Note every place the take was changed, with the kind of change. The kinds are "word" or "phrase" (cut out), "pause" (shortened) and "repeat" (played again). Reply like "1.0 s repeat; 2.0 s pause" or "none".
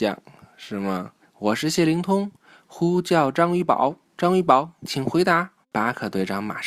1.2 s pause; 4.1 s pause; 5.6 s pause